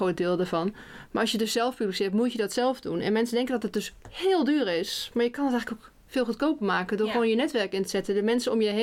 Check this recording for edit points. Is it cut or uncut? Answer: cut